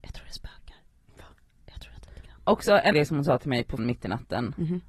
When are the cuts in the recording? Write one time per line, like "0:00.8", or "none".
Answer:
0:02.1
0:02.9
0:03.8